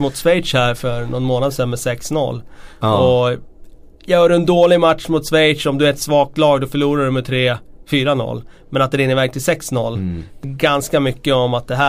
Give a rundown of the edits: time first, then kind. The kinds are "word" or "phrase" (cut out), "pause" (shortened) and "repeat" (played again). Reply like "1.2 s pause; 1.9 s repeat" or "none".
10.4 s word